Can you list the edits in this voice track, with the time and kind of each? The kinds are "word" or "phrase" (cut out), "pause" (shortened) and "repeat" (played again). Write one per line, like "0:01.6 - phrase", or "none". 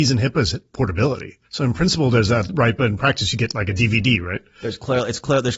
0:01.4 - pause

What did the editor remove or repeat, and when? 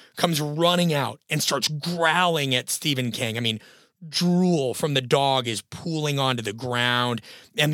none

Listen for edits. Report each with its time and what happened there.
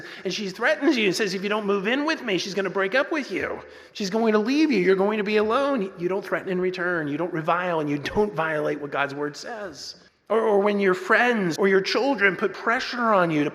0:03.9 - pause
0:10.1 - pause
0:11.6 - word

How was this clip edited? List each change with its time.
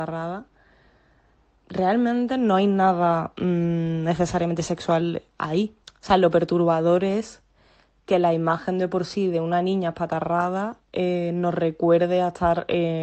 0:05.8 - pause

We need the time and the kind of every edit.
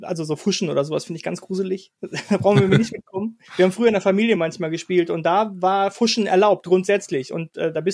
0:03.5 - pause
0:04.4 - word

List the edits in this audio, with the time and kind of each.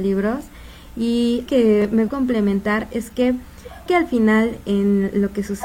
0:01.5 - word
0:02.1 - word
0:03.9 - word

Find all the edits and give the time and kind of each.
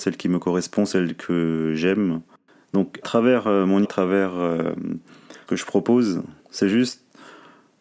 0:03.0 - word
0:03.8 - word
0:05.5 - word
0:06.4 - pause

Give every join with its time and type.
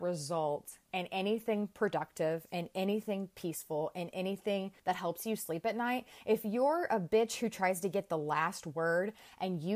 0:04.8 - pause

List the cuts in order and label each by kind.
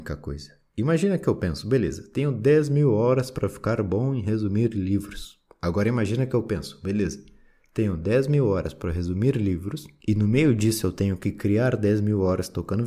none

